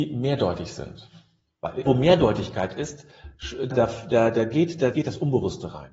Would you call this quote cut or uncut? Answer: cut